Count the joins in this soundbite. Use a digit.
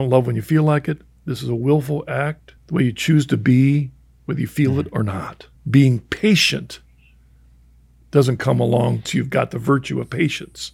3